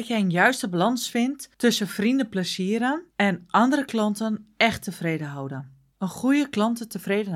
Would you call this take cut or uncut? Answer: cut